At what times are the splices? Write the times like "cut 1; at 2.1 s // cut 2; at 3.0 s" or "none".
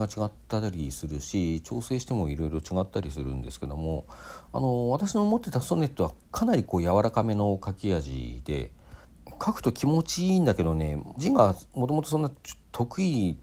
cut 1; at 11.2 s